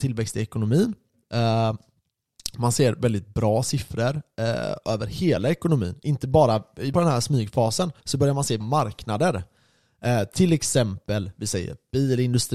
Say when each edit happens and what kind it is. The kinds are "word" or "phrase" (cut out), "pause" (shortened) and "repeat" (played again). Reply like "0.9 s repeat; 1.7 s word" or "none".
6.9 s word; 8.0 s pause; 8.6 s word